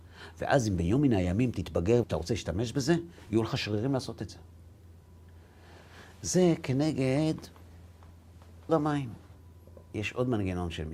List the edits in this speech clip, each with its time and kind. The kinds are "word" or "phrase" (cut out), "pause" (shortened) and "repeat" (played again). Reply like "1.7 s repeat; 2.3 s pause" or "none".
2.0 s word; 8.7 s word

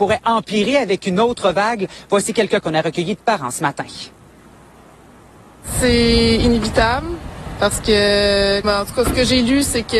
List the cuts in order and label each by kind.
2.6 s word; 8.6 s word

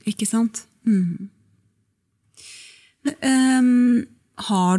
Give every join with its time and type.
3.1 s word

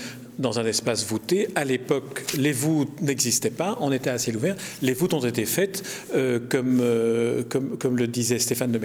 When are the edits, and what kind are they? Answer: none

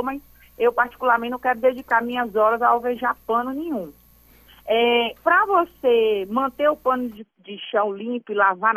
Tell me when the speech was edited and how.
none

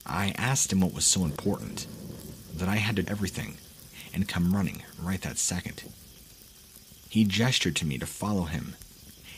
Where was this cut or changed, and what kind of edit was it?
3.0 s word

